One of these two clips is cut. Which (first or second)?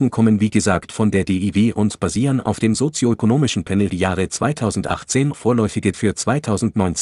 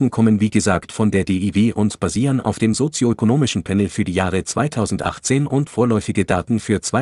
first